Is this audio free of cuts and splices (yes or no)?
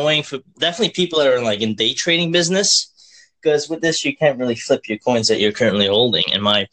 yes